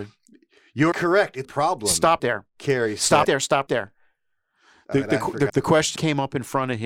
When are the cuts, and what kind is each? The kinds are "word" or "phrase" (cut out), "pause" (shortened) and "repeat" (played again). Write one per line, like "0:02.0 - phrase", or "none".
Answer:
0:00.9 - word
0:01.4 - word
0:02.2 - word
0:03.2 - word
0:03.7 - word
0:05.5 - word
0:06.0 - word